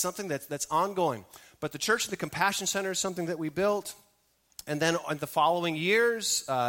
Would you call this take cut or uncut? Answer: uncut